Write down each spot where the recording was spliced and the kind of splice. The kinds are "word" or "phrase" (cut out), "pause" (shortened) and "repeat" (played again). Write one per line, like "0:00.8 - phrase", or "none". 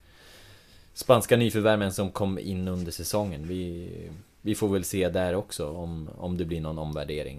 0:04.3 - pause